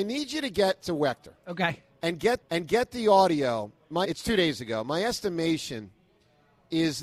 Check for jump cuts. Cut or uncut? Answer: cut